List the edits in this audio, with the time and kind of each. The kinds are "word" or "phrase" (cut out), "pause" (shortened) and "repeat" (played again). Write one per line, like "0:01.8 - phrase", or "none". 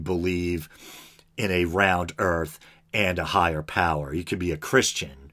none